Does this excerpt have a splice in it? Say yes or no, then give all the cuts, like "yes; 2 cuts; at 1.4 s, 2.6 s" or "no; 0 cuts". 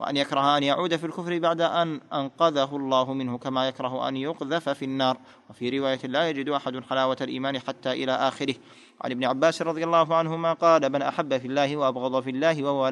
no; 0 cuts